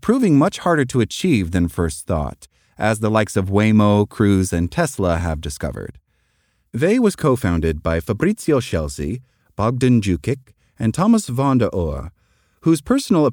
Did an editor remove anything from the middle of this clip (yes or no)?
no